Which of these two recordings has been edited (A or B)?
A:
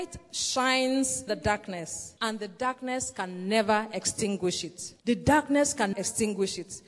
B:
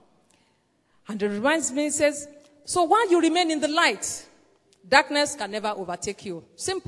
A